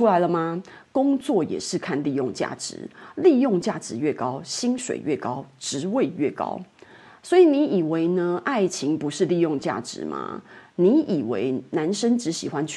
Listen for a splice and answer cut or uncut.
uncut